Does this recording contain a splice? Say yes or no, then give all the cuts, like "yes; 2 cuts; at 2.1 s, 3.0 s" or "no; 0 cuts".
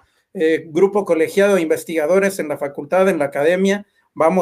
no; 0 cuts